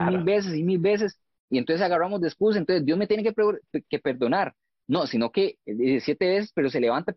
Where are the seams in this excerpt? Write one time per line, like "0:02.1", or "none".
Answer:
none